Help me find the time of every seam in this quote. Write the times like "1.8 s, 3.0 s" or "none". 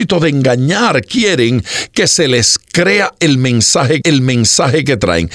4.0 s